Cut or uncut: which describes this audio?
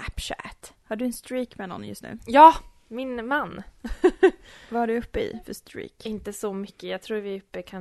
cut